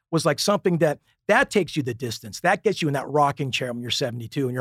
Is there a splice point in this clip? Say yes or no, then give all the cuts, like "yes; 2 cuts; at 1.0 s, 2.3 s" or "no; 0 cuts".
no; 0 cuts